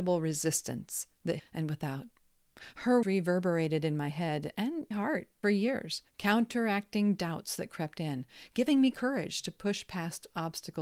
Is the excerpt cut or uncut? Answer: cut